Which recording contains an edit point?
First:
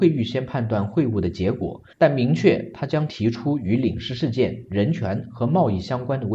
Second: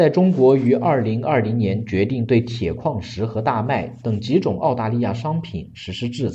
first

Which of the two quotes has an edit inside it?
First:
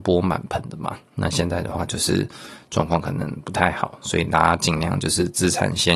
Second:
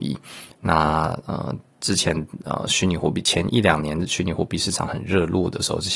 second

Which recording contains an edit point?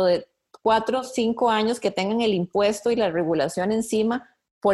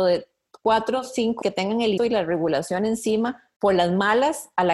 second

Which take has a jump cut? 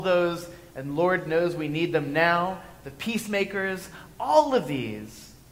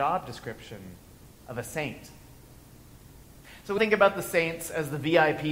second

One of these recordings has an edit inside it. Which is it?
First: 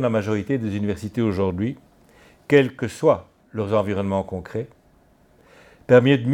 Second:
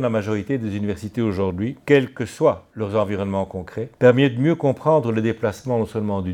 second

